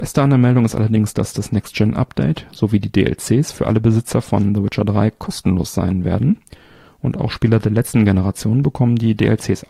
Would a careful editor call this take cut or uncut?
uncut